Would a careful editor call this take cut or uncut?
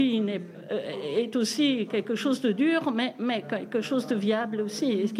uncut